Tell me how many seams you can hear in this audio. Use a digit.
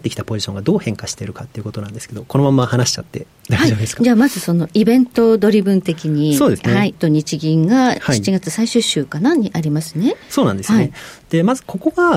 1